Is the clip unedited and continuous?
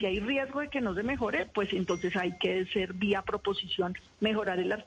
yes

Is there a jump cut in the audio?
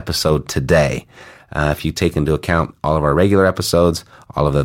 no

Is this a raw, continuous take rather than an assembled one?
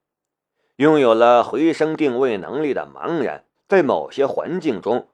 no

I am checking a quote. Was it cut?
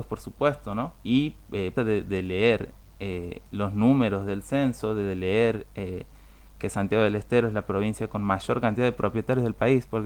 yes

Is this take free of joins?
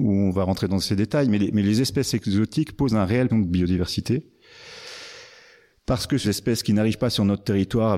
no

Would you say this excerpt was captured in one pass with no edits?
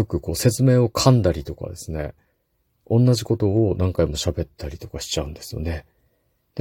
yes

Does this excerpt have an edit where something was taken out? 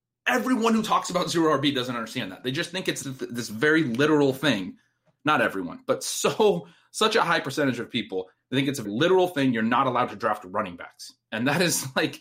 yes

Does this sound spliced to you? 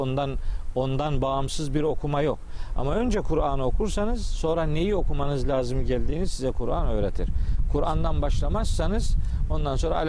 no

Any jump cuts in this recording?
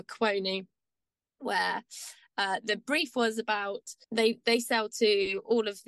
yes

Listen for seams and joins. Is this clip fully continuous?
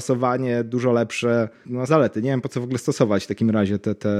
no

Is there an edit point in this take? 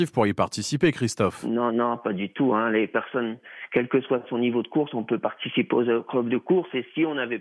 no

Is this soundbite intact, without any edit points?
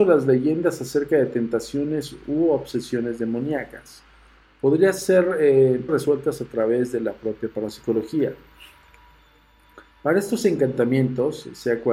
no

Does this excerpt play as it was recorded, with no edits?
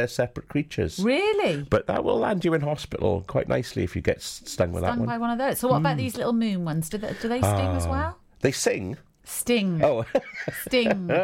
yes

